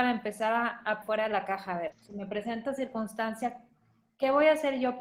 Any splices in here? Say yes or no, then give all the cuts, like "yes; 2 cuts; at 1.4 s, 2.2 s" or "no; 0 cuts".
yes; 3 cuts; at 1.0 s, 1.9 s, 2.7 s